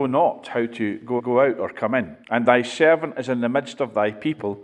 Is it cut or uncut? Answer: cut